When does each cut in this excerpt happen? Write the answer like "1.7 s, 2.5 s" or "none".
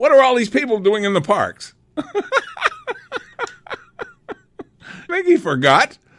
5.1 s